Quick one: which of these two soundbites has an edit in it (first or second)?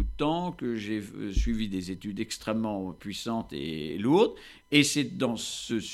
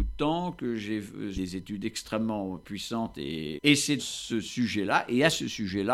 second